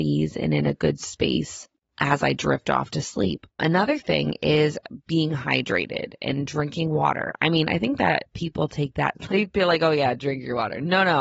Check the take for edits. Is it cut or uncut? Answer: cut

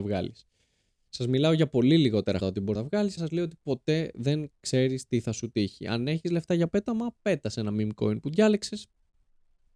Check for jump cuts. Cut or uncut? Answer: cut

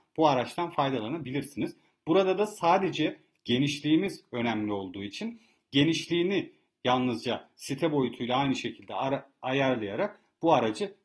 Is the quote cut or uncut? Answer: uncut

